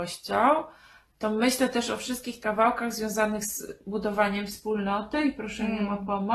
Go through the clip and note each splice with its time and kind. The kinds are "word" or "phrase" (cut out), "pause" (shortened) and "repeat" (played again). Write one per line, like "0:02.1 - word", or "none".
0:02.4 - word